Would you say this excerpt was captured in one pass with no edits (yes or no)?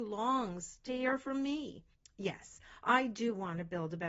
no